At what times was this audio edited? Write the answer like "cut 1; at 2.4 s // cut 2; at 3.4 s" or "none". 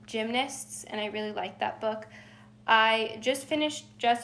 none